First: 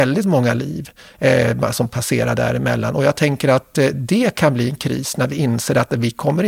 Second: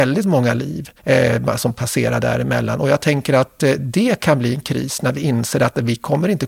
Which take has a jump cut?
second; 1 cut; at 1.0 s

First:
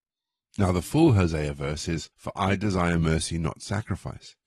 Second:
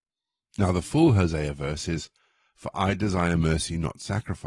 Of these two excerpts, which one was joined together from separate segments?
first; 1 cut; at 2.1 s

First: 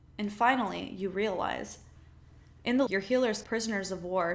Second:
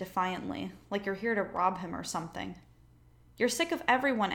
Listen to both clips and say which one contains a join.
first; 2 cuts; at 2.9 s, 3.4 s

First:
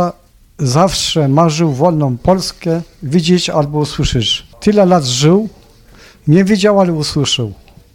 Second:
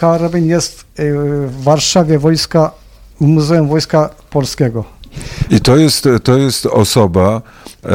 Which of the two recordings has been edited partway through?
first; 1 cut; at 4.5 s

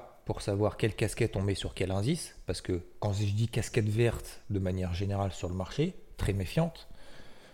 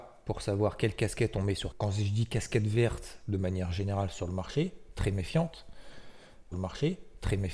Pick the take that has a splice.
second; 2 cuts; at 1.7 s, 6.5 s

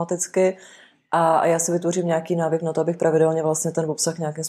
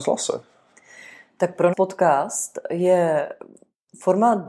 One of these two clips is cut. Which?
second; 1 cut; at 1.7 s

